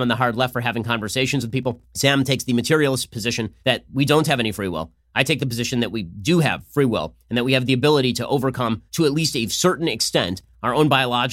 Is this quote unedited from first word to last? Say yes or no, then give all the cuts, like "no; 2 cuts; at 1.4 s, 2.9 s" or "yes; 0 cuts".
no; 3 cuts; at 1.9 s, 3.6 s, 8.9 s